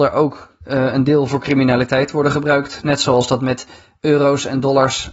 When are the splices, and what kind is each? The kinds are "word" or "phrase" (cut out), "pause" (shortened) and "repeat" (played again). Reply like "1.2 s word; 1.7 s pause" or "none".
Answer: none